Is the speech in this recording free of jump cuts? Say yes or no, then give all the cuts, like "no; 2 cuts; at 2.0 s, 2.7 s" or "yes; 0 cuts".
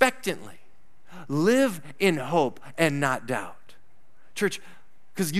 yes; 0 cuts